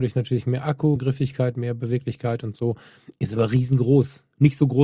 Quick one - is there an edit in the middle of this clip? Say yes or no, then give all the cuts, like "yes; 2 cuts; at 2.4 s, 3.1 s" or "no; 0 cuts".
yes; 1 cut; at 1.0 s